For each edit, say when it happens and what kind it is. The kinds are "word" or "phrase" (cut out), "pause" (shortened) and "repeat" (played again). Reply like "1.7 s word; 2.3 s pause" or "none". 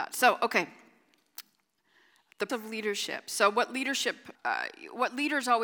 2.5 s word; 4.3 s word